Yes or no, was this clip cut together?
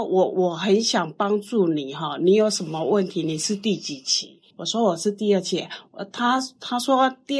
yes